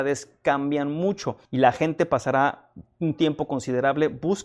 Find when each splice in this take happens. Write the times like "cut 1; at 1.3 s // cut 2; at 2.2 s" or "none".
cut 1; at 1.4 s